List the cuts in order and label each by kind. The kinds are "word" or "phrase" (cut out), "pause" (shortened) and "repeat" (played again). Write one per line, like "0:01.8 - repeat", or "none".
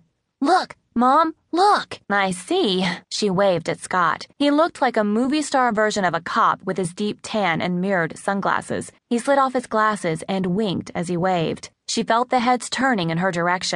0:02.0 - pause
0:03.0 - pause
0:04.3 - pause
0:09.0 - pause
0:11.7 - pause

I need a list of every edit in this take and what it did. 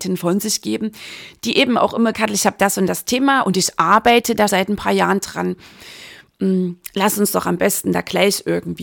0:02.1 - phrase
0:04.5 - word

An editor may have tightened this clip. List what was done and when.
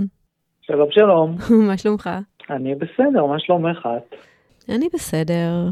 0:02.4 - pause
0:04.2 - pause

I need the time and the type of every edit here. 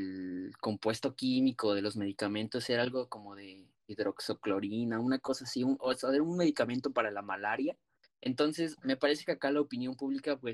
0:07.9 - pause

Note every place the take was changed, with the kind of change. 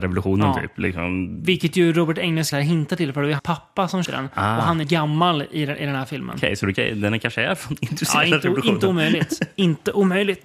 0:02.5 - word
0:03.4 - word
0:04.1 - word
0:04.8 - word
0:06.8 - word

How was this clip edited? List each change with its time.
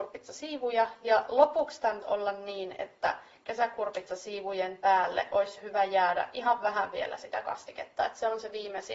0:02.0 - word

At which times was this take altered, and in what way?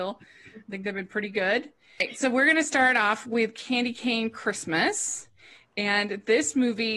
none

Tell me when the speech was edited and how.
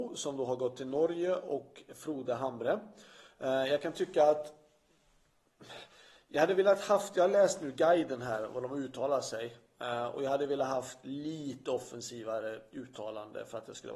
none

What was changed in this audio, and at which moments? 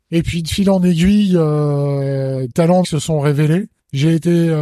0:02.5 - word
0:02.8 - word

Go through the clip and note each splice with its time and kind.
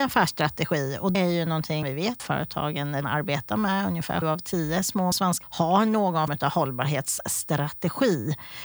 0:01.1 - word
0:01.8 - word
0:02.2 - word
0:03.0 - word
0:04.2 - word
0:05.1 - word
0:05.4 - word
0:06.3 - word

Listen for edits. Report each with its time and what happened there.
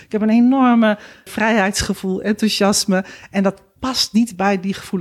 0:01.3 - word

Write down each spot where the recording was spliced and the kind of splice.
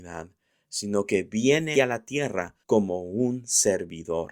0:01.7 - word
0:02.6 - pause

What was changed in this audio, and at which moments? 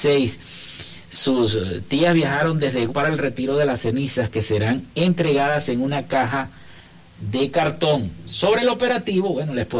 0:02.9 - word

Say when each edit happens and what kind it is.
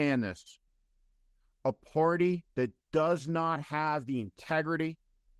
0:02.5 - pause

